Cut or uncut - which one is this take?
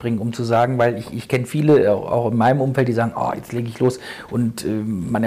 uncut